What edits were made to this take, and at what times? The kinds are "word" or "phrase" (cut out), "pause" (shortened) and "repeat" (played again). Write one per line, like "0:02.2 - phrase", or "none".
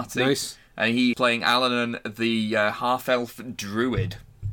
0:01.1 - word